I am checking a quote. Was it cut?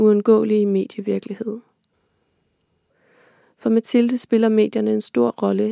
no; 0 cuts

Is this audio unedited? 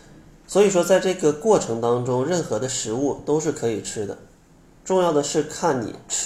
yes; 0 cuts

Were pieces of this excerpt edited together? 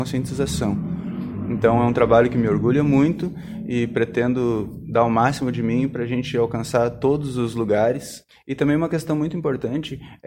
no; 0 cuts

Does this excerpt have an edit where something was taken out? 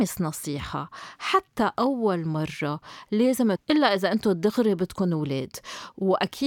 yes; 1 cut; at 3.6 s

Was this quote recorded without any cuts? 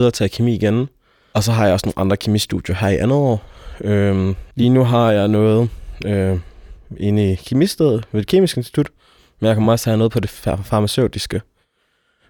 yes; 0 cuts

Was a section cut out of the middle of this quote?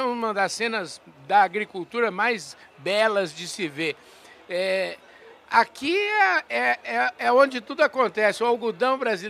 no; 0 cuts

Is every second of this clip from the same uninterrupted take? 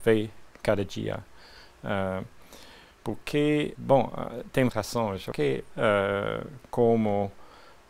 no; 3 cuts; at 3.7 s, 4.7 s, 5.3 s

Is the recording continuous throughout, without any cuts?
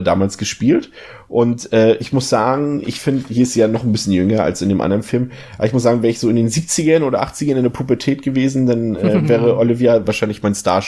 yes; 0 cuts

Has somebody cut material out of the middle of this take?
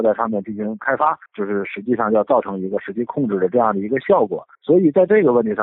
yes; 2 cuts; at 1.3 s, 4.5 s

